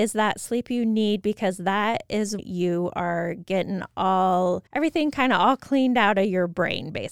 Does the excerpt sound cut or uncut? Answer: cut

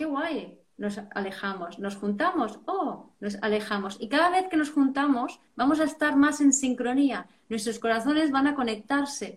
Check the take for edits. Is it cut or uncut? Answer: uncut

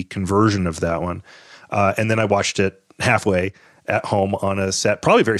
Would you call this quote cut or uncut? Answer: uncut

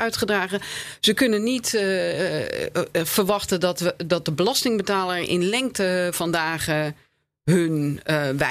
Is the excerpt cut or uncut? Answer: uncut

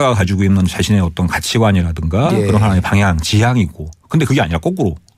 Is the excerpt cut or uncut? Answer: uncut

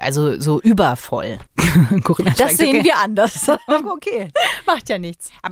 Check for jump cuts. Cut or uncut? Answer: cut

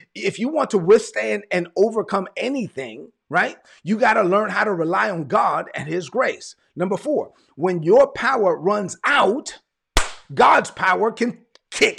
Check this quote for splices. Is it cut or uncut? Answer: uncut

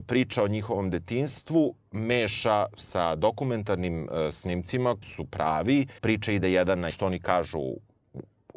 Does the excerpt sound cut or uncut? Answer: cut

